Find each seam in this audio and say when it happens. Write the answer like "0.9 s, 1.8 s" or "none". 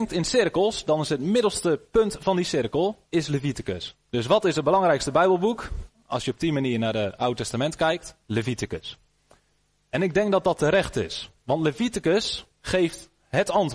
3.1 s, 4.0 s, 8.2 s, 12.5 s